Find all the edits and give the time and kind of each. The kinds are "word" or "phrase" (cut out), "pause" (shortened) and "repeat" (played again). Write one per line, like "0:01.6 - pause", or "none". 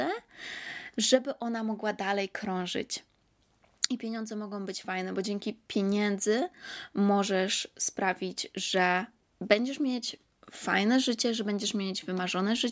none